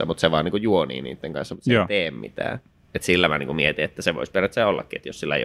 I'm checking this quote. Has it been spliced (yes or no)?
no